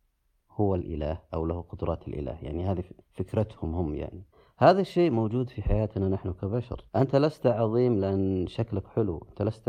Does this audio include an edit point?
yes; 3 cuts; at 3.0 s, 4.3 s, 6.9 s

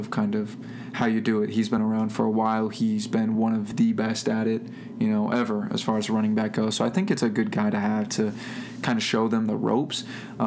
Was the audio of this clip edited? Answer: no; 0 cuts

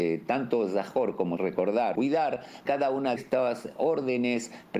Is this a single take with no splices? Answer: no; 4 cuts; at 1.4 s, 1.9 s, 2.6 s, 3.2 s

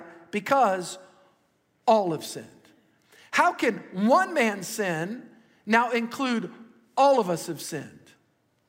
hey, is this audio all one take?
yes; 0 cuts

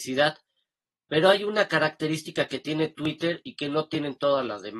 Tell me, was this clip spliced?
no; 0 cuts

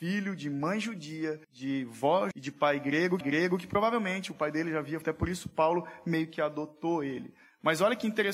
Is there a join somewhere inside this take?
yes; 4 cuts; at 1.4 s, 2.3 s, 3.2 s, 5.0 s

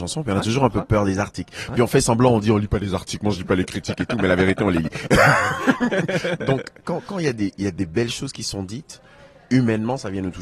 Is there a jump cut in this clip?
no; 0 cuts

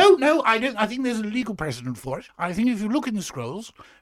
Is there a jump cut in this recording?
no; 0 cuts

